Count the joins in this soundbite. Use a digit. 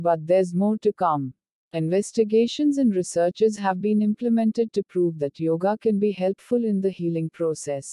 0